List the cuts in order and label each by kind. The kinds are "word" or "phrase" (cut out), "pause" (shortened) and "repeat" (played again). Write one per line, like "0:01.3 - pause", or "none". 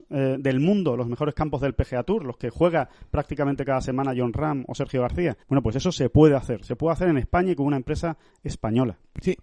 0:05.4 - pause

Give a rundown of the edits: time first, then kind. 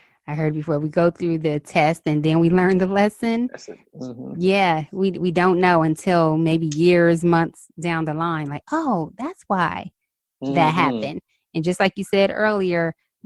none

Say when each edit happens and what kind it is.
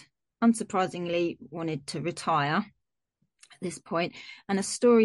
none

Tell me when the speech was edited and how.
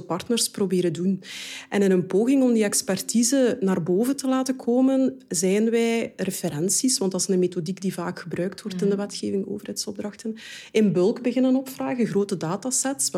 none

